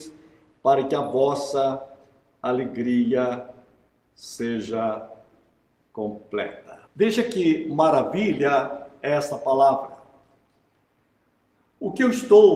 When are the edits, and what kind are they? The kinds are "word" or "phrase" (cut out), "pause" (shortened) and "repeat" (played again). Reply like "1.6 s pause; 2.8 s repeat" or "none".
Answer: 6.9 s pause